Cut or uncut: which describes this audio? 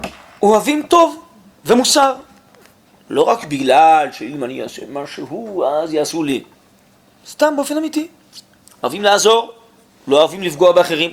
uncut